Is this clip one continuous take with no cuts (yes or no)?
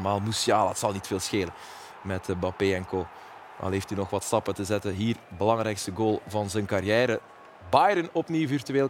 yes